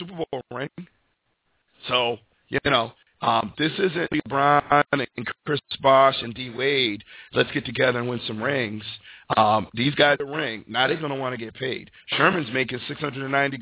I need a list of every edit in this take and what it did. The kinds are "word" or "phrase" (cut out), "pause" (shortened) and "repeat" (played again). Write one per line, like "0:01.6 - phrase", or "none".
none

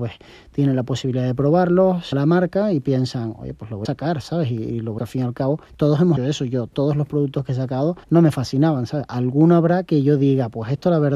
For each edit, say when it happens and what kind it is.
0:02.1 - phrase
0:03.9 - word
0:05.0 - phrase
0:05.7 - pause
0:06.2 - word
0:08.0 - pause

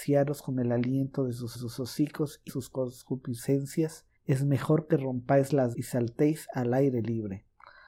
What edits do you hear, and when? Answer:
0:01.5 - repeat
0:02.5 - word
0:04.2 - pause
0:05.7 - word

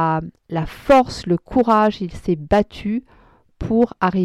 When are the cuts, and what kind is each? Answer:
none

